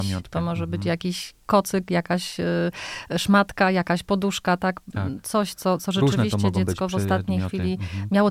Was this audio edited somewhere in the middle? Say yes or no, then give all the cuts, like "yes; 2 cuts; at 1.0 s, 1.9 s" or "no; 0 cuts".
yes; 1 cut; at 1.4 s